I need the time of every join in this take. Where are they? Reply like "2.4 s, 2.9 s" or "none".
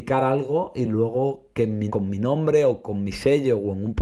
1.9 s